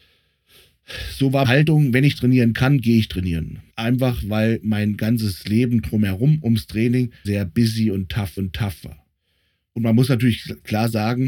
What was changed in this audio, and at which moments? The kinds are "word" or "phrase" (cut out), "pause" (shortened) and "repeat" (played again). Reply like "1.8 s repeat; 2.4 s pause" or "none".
1.4 s word; 3.7 s pause; 7.2 s word; 8.4 s repeat